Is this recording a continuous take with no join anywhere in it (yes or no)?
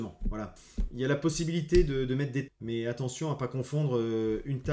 no